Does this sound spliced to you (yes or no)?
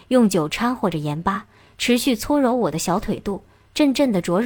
no